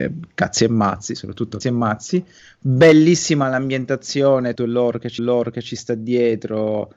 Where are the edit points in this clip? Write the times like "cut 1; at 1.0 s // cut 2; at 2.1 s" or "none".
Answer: cut 1; at 1.6 s // cut 2; at 2.4 s // cut 3; at 4.6 s // cut 4; at 5.2 s